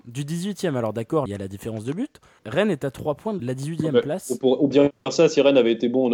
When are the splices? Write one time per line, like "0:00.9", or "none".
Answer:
0:01.3
0:02.4
0:03.4
0:04.7

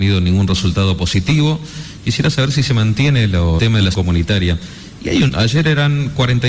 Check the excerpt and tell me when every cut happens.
0:03.6
0:03.9
0:05.3

